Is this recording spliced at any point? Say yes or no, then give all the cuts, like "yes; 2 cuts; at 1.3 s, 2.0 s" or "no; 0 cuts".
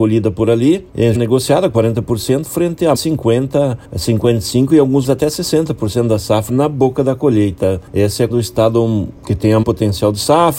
yes; 6 cuts; at 1.1 s, 2.9 s, 5.0 s, 6.5 s, 8.3 s, 9.6 s